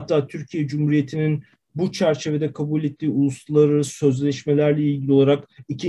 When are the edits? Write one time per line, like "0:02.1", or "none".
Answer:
none

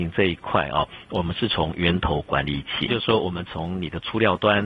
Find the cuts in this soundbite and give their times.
0:02.9

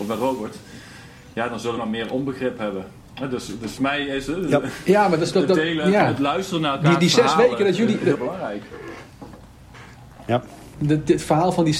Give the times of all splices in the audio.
0:01.8
0:03.8
0:05.3
0:08.2
0:10.7

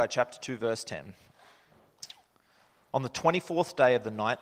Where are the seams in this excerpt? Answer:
none

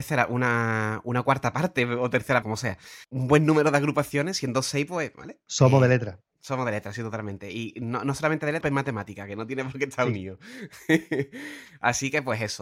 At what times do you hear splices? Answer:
0:02.4
0:03.0
0:08.6

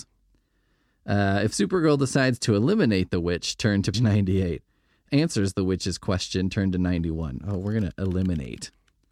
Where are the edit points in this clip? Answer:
0:03.9
0:05.1

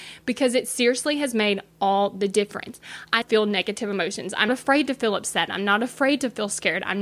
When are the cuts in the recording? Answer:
0:03.2
0:04.5

